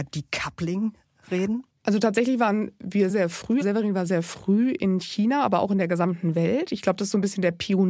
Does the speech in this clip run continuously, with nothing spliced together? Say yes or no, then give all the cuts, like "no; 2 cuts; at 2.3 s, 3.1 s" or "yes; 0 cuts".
no; 3 cuts; at 3.1 s, 3.6 s, 4.1 s